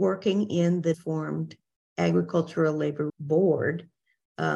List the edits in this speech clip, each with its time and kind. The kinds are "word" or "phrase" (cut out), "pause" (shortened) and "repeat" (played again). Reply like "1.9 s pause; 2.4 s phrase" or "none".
0.9 s word; 3.1 s word